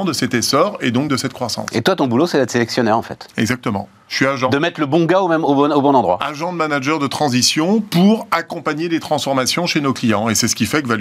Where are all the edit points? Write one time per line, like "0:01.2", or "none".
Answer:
none